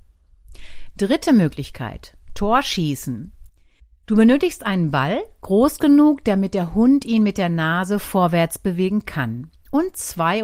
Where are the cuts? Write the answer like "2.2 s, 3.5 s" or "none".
none